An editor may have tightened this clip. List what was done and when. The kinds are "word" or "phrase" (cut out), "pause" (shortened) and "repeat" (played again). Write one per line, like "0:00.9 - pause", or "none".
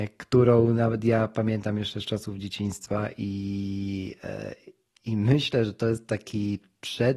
none